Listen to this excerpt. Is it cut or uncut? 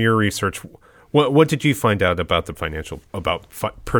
cut